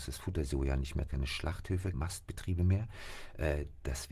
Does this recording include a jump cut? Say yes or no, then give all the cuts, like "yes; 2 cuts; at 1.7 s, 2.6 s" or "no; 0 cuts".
yes; 2 cuts; at 1.1 s, 1.9 s